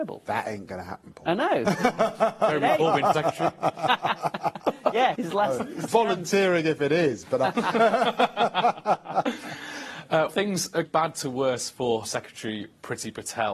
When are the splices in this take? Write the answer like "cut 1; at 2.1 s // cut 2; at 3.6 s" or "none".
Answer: cut 1; at 3.1 s // cut 2; at 5.1 s // cut 3; at 5.9 s // cut 4; at 10.3 s // cut 5; at 10.8 s // cut 6; at 12.0 s